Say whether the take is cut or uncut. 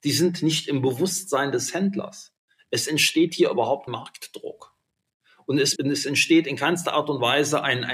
cut